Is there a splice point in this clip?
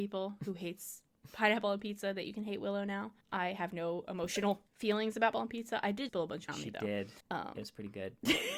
yes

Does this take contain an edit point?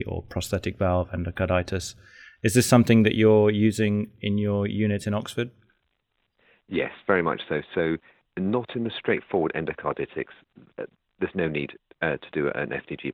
no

